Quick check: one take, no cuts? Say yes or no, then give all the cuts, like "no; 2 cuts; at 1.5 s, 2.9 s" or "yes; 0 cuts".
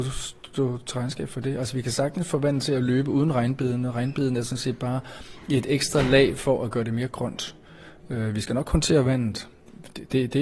yes; 0 cuts